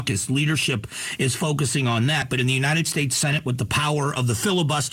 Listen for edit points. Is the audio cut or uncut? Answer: uncut